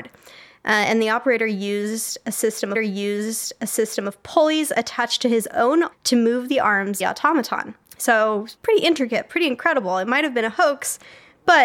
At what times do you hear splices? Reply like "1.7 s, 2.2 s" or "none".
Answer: 2.7 s, 5.9 s, 7.0 s, 8.6 s